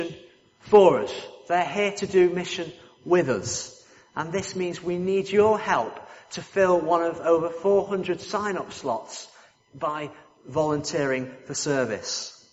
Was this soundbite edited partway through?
no; 0 cuts

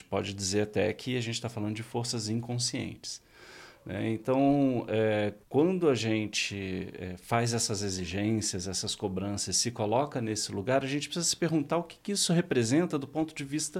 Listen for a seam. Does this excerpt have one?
yes; 1 cut; at 5.4 s

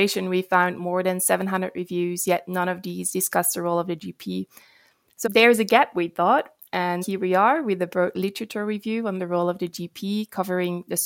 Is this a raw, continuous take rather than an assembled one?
no; 2 cuts; at 5.2 s, 7.0 s

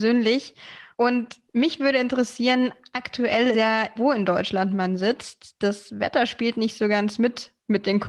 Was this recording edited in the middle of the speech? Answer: yes; 3 cuts; at 0.9 s, 3.5 s, 4.0 s

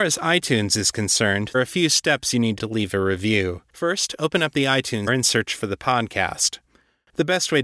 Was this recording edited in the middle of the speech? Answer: yes; 4 cuts; at 1.5 s, 2.6 s, 3.7 s, 5.1 s

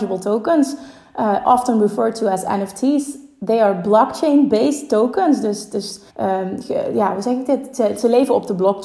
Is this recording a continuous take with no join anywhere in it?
no; 1 cut; at 6.1 s

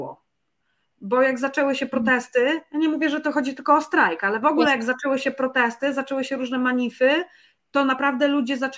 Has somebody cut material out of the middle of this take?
no; 0 cuts

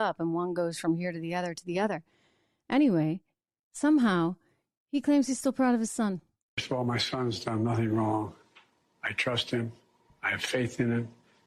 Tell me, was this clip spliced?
no; 0 cuts

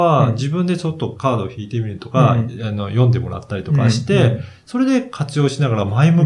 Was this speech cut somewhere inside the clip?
no; 0 cuts

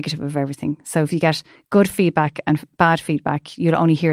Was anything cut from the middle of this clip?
no; 0 cuts

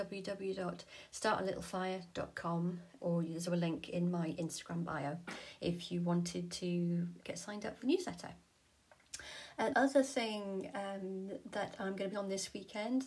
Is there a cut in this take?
yes; 6 cuts; at 3.0 s, 3.5 s, 7.2 s, 7.8 s, 9.7 s, 12.1 s

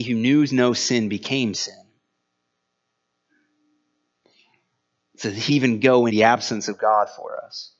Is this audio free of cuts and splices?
no; 2 cuts; at 5.5 s, 6.1 s

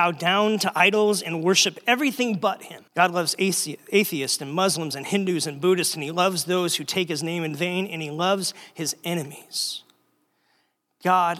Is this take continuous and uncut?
no; 1 cut; at 2.9 s

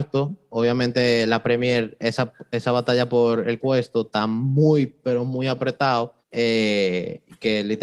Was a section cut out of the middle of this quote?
yes; 2 cuts; at 3.6 s, 6.2 s

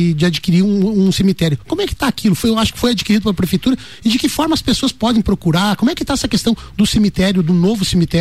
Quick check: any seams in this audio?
no; 0 cuts

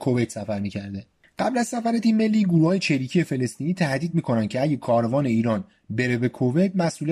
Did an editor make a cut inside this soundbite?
no; 0 cuts

